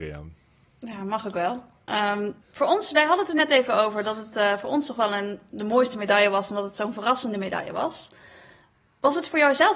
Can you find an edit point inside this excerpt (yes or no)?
yes